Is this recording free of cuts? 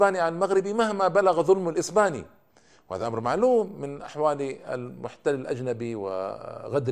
yes; 0 cuts

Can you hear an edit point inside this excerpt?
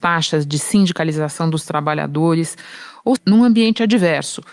yes; 1 cut; at 3.2 s

